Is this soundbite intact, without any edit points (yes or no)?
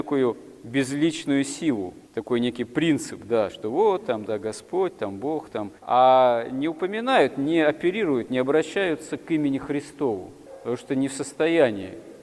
no